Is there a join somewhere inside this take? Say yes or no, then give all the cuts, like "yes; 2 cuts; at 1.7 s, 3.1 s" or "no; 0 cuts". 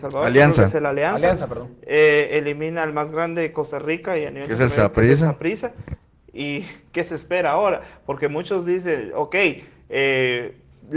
no; 0 cuts